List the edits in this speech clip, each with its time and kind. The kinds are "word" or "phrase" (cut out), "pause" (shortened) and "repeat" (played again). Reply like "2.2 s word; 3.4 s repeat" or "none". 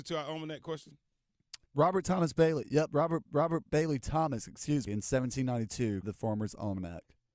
1.6 s pause; 3.3 s repeat; 4.9 s word; 6.0 s word